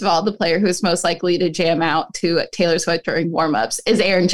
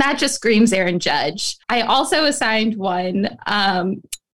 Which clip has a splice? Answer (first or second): second